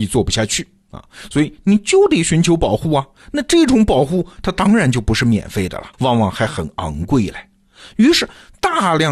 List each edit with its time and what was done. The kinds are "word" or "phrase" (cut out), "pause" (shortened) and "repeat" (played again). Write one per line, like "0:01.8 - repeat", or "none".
0:05.9 - pause